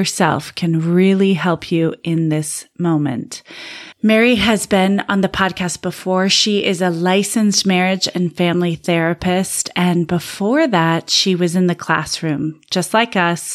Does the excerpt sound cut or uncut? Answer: uncut